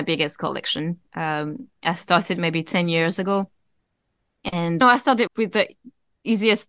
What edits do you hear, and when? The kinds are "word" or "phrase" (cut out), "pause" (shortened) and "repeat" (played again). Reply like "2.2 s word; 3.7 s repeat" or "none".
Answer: 4.8 s phrase; 5.3 s word